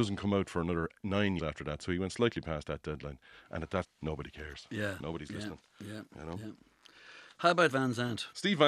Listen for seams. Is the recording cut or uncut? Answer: cut